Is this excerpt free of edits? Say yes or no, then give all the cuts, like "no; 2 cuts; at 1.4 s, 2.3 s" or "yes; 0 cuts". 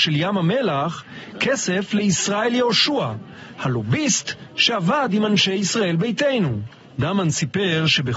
yes; 0 cuts